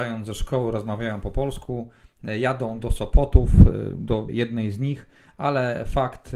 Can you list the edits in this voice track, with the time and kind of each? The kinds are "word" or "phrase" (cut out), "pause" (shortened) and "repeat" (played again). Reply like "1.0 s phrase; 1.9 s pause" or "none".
4.3 s word